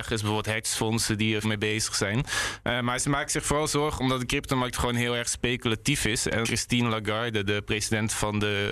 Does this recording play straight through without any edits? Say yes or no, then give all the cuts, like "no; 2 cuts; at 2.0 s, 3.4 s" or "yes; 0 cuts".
no; 2 cuts; at 1.4 s, 6.4 s